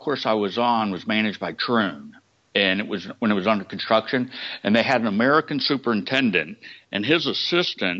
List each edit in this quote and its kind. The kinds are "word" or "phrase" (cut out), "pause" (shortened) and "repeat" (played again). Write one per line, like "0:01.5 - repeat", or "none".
none